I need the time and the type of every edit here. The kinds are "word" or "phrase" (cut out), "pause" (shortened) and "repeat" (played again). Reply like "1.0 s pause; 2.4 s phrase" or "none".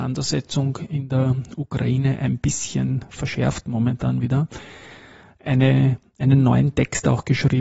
none